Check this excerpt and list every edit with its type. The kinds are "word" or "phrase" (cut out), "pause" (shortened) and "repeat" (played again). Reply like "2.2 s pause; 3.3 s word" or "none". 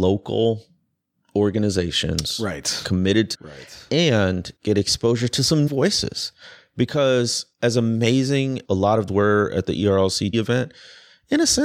3.3 s phrase; 4.6 s pause; 5.7 s word; 7.5 s pause; 8.6 s word; 9.1 s phrase; 10.3 s word